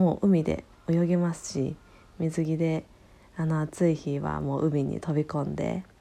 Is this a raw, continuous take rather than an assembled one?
yes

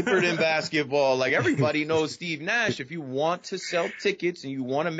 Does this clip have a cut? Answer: no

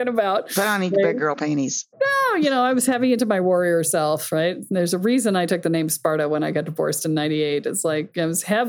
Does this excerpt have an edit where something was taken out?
yes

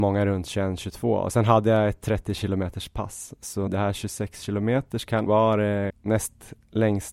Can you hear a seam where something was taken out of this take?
yes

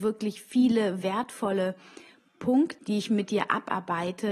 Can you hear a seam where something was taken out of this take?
yes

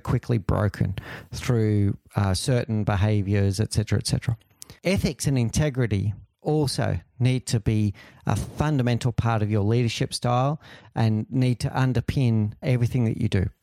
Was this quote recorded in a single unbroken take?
no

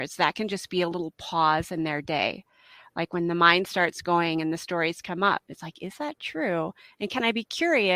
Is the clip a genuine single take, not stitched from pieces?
yes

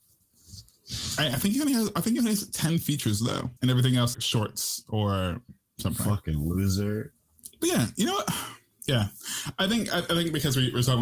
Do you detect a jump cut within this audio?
yes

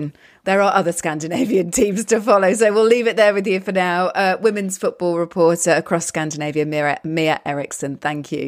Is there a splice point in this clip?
no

